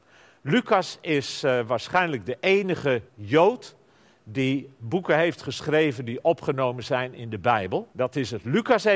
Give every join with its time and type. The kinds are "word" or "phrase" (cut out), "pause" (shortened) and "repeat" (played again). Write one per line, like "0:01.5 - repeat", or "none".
0:03.1 - pause
0:07.9 - pause